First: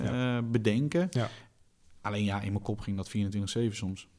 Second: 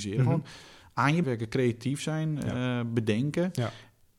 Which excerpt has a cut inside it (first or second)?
second